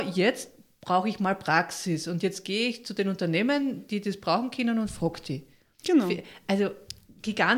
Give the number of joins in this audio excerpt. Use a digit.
0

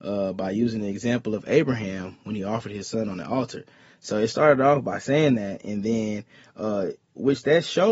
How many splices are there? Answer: 0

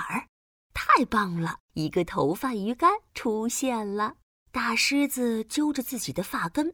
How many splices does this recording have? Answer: 3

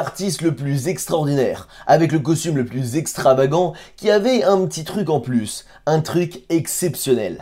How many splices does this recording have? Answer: 0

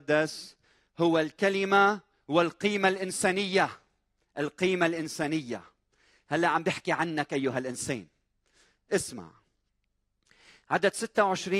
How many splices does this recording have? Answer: 0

